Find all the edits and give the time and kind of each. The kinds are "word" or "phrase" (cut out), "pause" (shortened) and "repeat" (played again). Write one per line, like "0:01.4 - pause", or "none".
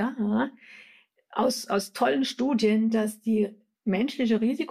none